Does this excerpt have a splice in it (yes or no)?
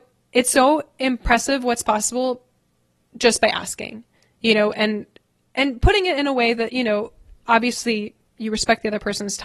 no